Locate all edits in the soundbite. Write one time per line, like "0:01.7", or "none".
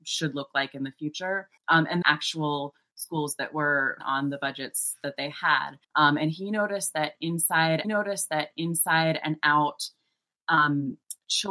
0:01.6
0:02.0
0:04.0
0:05.8
0:07.8